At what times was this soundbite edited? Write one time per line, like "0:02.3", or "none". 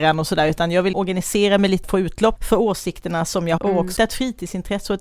0:00.9
0:01.8
0:02.4
0:03.6
0:04.0